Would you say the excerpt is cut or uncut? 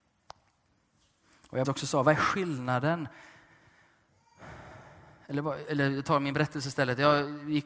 cut